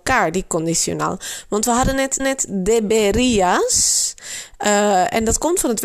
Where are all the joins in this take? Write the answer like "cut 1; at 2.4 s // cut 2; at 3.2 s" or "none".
cut 1; at 2.2 s